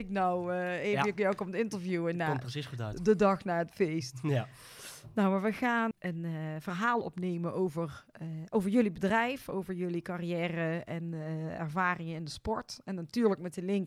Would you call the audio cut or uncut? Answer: cut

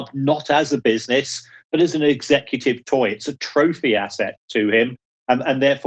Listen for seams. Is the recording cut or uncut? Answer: uncut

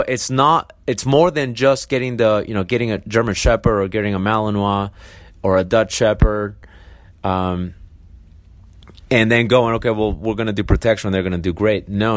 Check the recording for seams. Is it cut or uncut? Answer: uncut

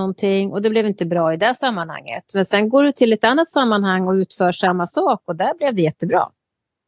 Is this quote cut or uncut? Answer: uncut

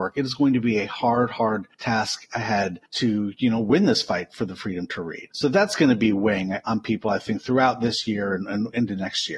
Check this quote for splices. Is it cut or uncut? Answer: cut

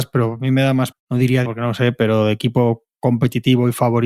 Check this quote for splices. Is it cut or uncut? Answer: cut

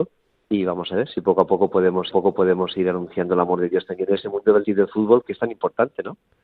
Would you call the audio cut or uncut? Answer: cut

